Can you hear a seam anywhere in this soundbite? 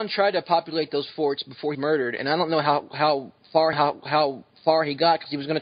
yes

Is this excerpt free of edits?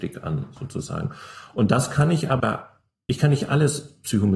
no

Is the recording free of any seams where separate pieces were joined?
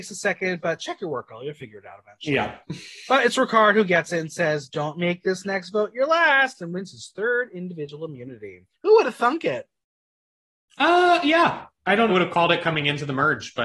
no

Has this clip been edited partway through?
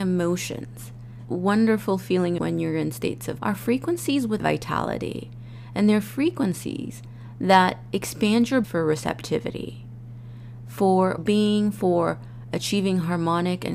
yes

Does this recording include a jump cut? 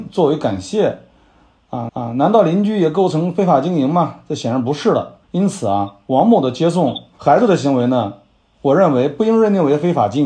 yes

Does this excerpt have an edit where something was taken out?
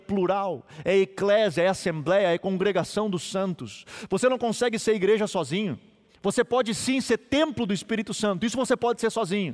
no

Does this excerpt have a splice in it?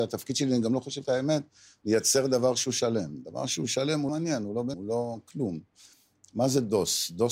yes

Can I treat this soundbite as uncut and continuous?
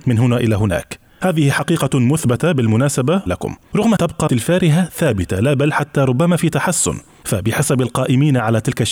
no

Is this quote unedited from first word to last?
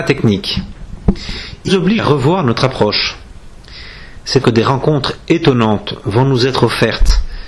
no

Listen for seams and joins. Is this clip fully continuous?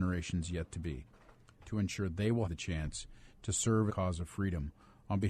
no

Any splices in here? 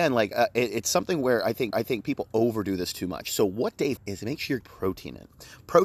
yes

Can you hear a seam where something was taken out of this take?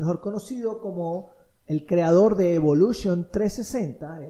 no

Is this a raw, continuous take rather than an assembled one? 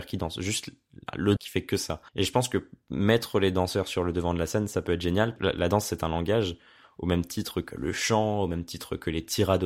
no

